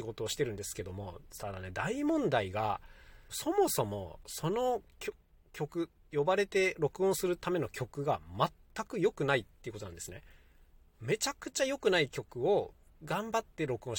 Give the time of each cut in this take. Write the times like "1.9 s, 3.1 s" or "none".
3.3 s

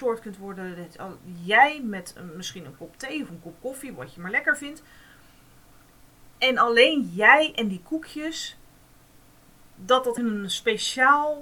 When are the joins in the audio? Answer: 6.4 s, 10.2 s

